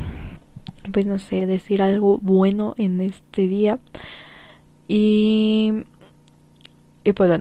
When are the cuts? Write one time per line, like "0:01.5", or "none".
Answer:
none